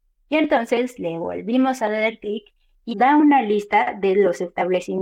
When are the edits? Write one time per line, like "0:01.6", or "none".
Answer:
0:02.9